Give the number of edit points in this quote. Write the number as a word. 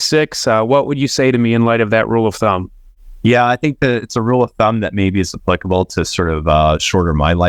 zero